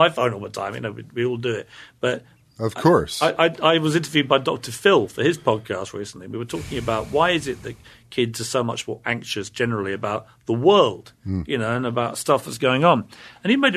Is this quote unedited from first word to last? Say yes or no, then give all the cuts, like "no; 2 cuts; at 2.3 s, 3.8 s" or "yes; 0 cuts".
yes; 0 cuts